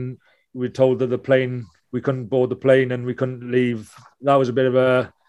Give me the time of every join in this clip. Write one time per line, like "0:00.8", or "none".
none